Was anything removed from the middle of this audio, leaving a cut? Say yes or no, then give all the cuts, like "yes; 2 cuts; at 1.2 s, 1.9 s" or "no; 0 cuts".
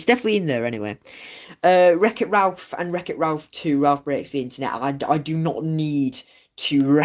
no; 0 cuts